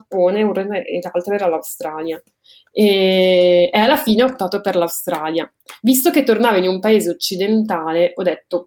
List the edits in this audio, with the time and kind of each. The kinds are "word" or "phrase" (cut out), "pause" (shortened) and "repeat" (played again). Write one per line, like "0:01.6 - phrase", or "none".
none